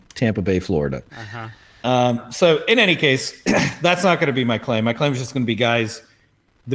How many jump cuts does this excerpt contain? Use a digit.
0